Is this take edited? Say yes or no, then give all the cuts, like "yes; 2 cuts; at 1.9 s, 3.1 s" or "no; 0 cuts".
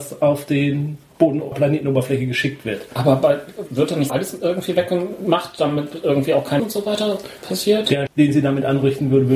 yes; 5 cuts; at 1.5 s, 3.7 s, 4.1 s, 6.6 s, 8.1 s